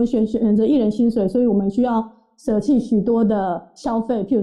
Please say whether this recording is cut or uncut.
uncut